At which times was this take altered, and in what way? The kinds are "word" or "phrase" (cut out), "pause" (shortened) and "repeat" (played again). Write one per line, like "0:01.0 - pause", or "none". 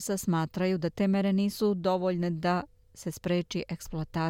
none